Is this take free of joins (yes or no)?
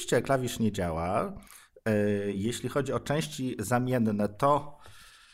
yes